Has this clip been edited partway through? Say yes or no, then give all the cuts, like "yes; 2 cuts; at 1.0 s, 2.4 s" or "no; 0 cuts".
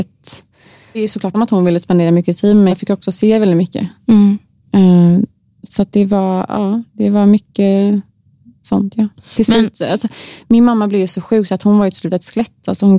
yes; 3 cuts; at 0.9 s, 1.3 s, 2.7 s